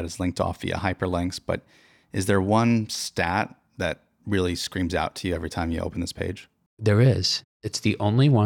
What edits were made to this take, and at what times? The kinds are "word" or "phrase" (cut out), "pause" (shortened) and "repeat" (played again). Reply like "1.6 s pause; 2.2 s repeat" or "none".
none